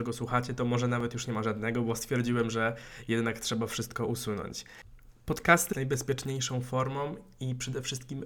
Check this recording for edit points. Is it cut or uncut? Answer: cut